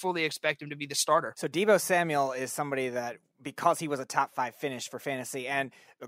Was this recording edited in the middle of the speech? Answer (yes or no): no